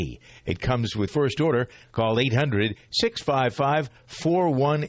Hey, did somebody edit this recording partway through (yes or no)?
yes